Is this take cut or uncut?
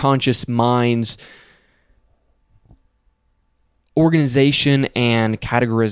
uncut